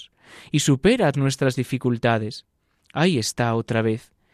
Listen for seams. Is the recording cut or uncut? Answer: cut